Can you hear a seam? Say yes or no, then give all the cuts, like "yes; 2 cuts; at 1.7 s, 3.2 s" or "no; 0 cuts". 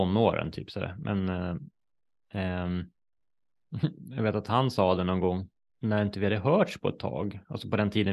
yes; 1 cut; at 5.7 s